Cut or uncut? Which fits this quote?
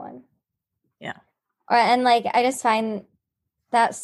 uncut